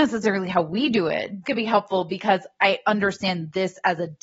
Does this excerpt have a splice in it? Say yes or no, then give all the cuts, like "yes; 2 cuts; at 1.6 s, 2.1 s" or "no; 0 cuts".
yes; 1 cut; at 1.4 s